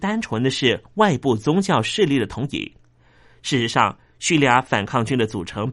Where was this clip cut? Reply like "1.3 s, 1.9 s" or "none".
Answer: none

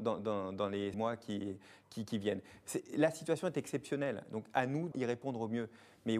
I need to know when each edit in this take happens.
0.9 s, 4.9 s

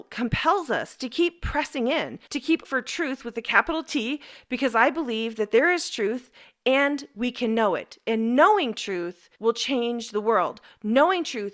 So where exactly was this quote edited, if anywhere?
2.3 s, 2.6 s, 9.3 s

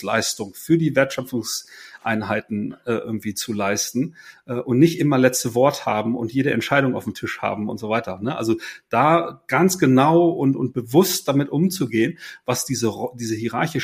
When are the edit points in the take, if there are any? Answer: none

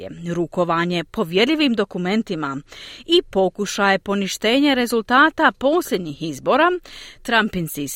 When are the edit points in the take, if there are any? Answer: none

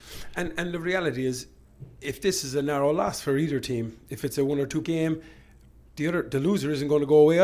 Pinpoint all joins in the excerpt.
4.8 s

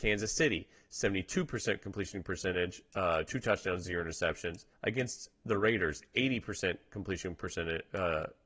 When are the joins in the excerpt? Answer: 4.7 s

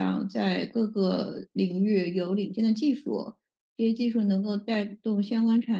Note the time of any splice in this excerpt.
none

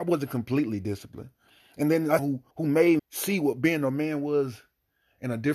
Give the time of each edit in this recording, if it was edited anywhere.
2.2 s, 2.5 s, 3.0 s

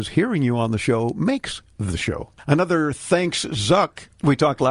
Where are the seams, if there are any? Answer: none

